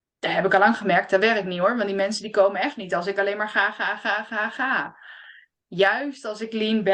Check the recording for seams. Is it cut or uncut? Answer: uncut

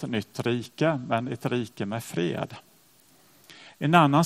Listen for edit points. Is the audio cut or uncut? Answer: uncut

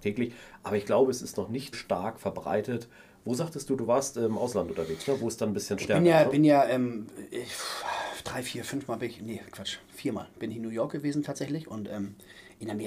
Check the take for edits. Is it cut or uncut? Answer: cut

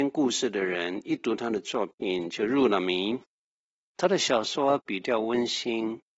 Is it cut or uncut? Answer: uncut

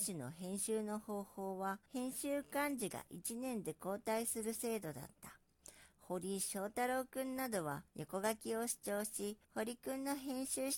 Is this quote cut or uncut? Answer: cut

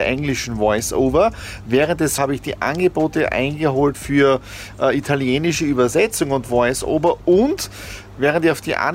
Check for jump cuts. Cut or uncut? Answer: cut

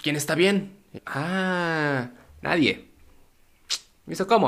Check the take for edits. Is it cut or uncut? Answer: cut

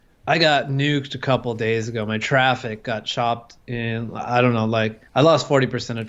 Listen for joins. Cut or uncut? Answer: cut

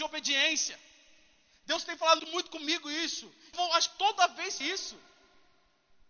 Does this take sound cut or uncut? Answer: cut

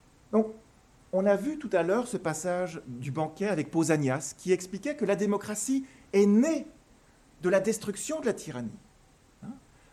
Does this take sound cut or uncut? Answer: uncut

